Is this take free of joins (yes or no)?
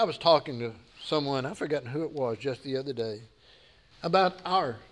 yes